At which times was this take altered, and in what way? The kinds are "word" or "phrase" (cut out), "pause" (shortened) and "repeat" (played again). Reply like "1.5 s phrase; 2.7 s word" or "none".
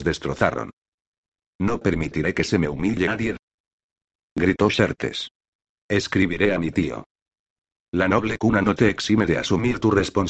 none